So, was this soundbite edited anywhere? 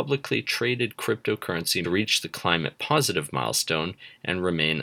yes; 1 cut; at 1.8 s

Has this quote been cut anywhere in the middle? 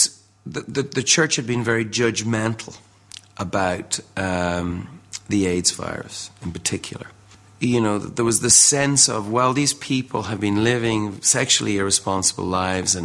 no; 0 cuts

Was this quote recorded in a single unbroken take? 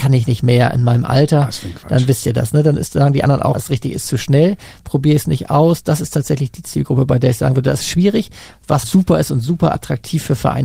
no; 2 cuts; at 3.5 s, 8.8 s

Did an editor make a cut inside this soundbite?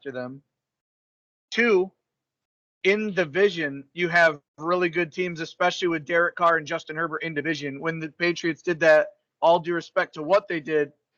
no; 0 cuts

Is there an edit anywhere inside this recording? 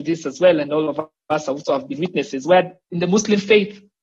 yes; 1 cut; at 2.8 s

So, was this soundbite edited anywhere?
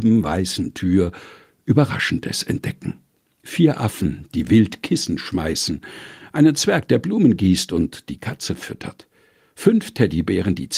no; 0 cuts

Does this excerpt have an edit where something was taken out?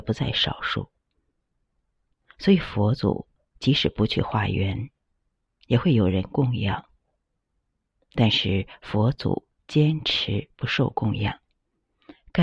no; 0 cuts

